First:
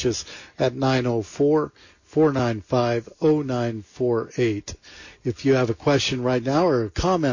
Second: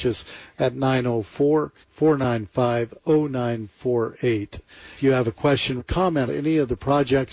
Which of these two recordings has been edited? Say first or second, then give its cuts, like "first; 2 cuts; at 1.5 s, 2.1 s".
second; 4 cuts; at 1.8 s, 5.0 s, 5.8 s, 6.3 s